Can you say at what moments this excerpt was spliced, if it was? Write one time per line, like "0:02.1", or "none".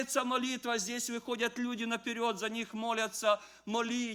none